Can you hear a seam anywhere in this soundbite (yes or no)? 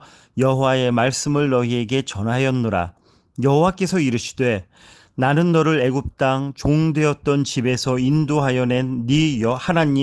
no